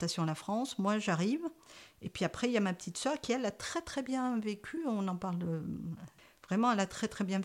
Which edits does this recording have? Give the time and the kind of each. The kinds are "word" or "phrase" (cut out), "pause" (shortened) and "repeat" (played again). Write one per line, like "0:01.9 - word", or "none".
none

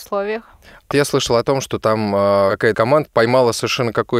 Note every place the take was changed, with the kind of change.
0:00.9 - word
0:02.7 - word

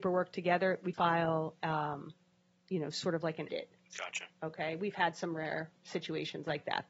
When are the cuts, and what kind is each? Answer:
0:00.9 - phrase
0:03.5 - phrase

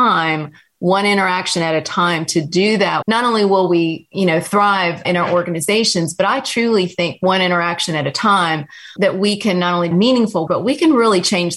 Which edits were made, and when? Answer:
0:03.0 - word
0:05.0 - word
0:09.0 - word
0:09.9 - word
0:10.5 - word

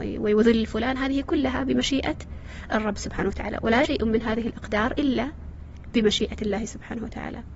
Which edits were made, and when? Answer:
0:03.8 - word

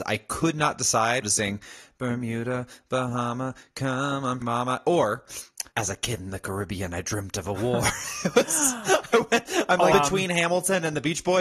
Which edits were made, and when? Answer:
0:01.2 - phrase
0:04.4 - word
0:05.7 - pause
0:09.9 - word

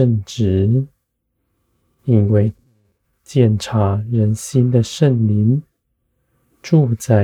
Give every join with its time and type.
none

